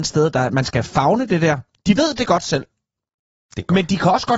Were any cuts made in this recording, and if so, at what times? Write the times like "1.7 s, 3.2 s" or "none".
none